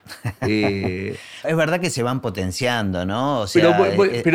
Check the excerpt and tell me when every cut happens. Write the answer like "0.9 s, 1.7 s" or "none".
1.4 s